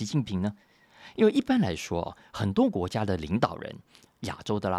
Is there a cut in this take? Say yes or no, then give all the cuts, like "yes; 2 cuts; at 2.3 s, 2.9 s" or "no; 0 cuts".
no; 0 cuts